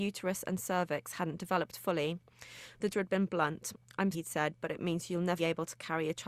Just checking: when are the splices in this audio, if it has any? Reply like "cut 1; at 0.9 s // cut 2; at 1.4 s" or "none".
cut 1; at 2.9 s // cut 2; at 4.1 s // cut 3; at 5.4 s